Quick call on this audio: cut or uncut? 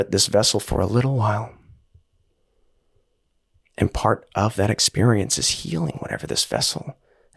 uncut